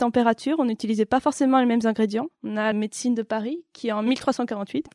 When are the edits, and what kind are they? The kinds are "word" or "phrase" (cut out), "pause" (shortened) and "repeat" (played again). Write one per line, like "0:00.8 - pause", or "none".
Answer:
0:02.7 - phrase